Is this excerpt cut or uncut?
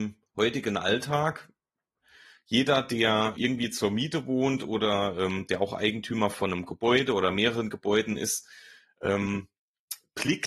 cut